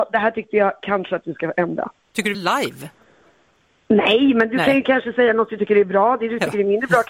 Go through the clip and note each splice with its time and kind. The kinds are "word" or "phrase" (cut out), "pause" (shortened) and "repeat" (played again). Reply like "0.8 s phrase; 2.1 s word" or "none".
2.3 s phrase